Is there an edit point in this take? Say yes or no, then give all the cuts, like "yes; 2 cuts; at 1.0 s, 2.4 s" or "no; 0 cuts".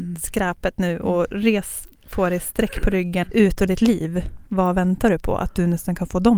yes; 2 cuts; at 3.2 s, 3.7 s